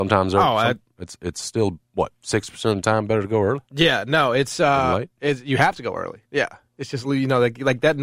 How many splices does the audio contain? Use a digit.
4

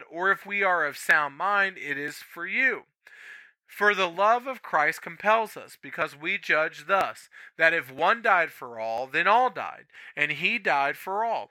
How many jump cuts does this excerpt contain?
0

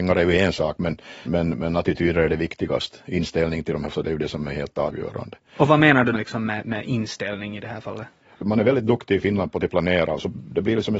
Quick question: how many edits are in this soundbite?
3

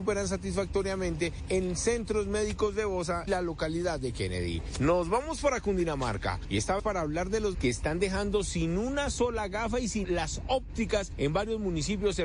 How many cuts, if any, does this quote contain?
4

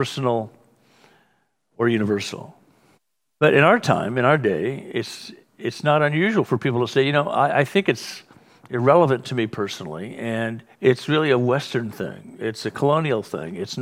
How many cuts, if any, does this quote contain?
2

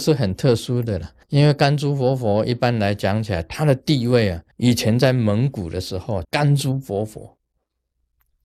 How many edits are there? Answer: 3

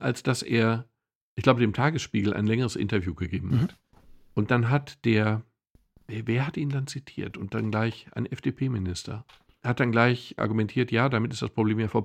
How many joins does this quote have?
0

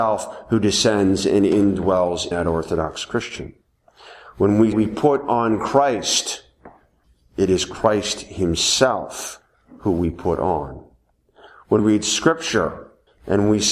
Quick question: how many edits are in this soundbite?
3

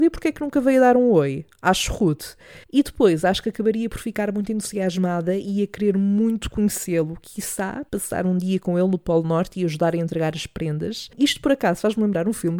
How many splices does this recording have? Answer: 2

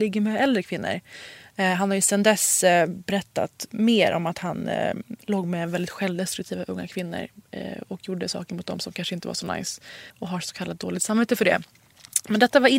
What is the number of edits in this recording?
1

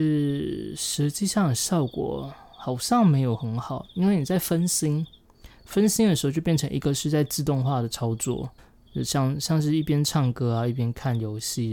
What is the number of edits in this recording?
1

